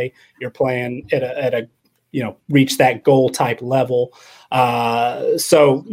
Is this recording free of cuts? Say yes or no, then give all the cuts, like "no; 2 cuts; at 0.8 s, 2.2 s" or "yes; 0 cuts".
yes; 0 cuts